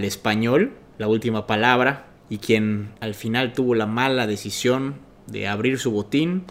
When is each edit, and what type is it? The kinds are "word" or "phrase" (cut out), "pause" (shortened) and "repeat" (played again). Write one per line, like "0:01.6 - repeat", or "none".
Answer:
0:02.2 - pause
0:03.0 - pause

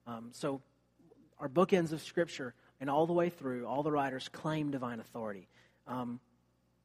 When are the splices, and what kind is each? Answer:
none

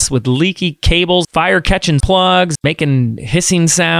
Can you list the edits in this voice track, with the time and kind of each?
0:01.2 - word
0:02.0 - word
0:02.5 - word

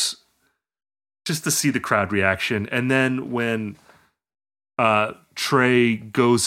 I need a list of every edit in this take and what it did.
none

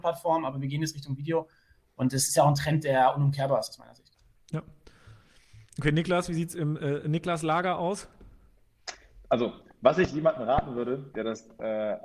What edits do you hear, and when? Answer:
none

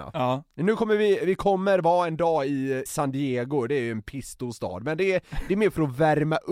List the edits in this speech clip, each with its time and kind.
0:02.9 - word

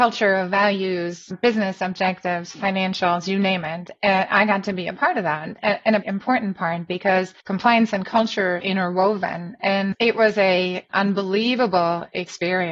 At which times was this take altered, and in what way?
0:06.0 - word
0:07.4 - pause
0:08.6 - word
0:10.9 - word

